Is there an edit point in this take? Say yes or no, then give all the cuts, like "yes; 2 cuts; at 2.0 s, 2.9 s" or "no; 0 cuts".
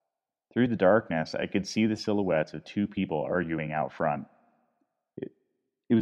no; 0 cuts